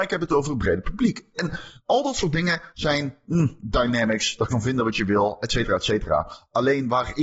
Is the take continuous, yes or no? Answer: no